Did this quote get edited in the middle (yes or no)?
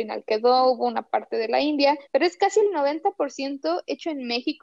yes